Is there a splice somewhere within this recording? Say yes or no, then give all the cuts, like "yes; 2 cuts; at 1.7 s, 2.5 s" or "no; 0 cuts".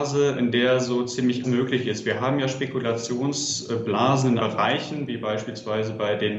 yes; 2 cuts; at 1.4 s, 4.4 s